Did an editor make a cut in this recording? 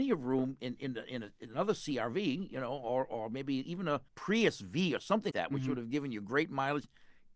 yes; 2 cuts; at 4.1 s, 5.3 s

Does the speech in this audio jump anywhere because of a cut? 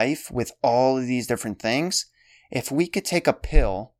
no; 0 cuts

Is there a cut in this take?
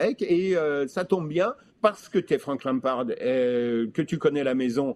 yes; 1 cut; at 1.7 s

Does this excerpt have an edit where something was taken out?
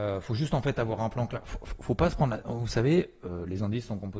no; 0 cuts

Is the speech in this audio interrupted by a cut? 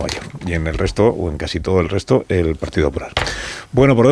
no; 0 cuts

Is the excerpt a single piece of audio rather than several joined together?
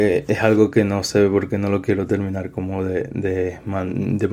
yes; 0 cuts

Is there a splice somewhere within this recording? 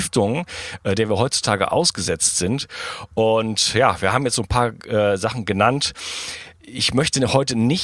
no; 0 cuts

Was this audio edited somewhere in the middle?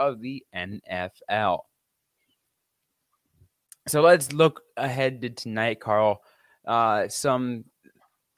no; 0 cuts

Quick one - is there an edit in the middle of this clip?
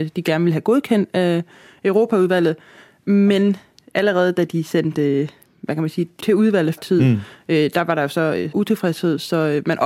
yes; 3 cuts; at 6.2 s, 6.8 s, 8.5 s

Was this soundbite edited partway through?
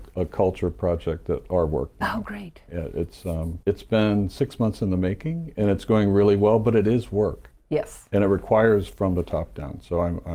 yes; 1 cut; at 3.6 s

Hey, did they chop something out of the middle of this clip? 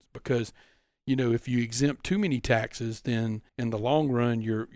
yes; 1 cut; at 3.5 s

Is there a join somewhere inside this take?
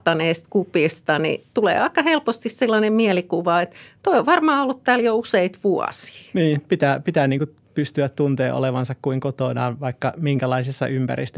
no; 0 cuts

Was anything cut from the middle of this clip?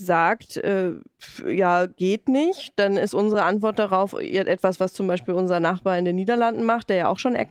no; 0 cuts

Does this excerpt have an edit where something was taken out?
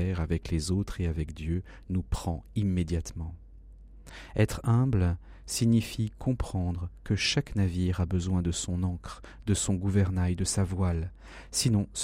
no; 0 cuts

